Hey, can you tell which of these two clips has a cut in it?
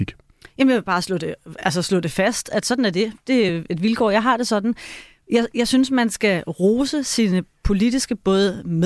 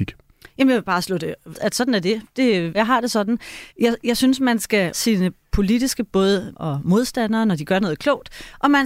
second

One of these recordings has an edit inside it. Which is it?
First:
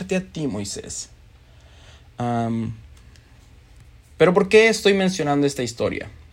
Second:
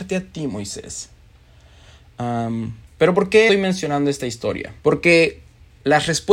second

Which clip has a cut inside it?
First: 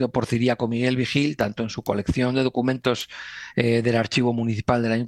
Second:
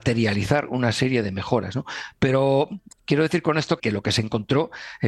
second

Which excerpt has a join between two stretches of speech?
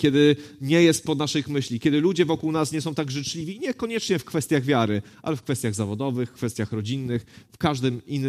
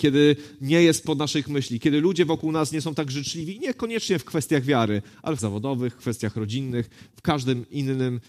second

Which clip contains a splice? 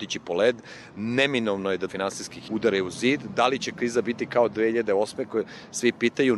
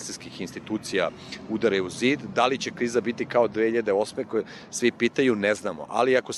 first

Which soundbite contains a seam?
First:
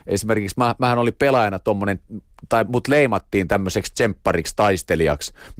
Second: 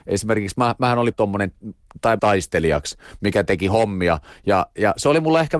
second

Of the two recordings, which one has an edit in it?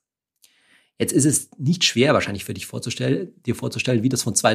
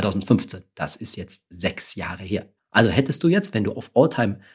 second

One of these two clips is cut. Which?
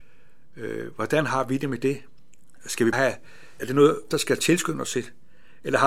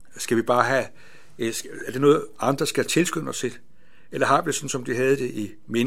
first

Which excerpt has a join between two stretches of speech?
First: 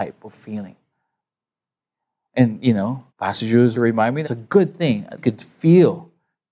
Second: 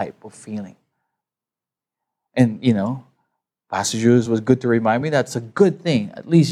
first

